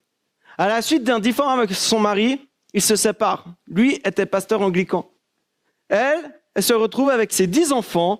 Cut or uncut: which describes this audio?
uncut